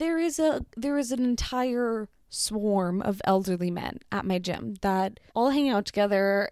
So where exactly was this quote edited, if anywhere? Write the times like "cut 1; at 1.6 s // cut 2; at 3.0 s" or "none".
cut 1; at 5.3 s